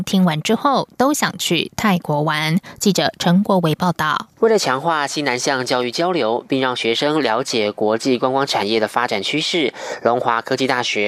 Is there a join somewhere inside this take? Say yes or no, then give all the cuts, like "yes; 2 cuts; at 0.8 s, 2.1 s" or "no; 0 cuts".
no; 0 cuts